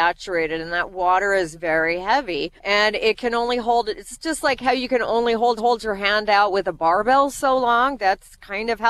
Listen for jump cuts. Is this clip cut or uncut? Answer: cut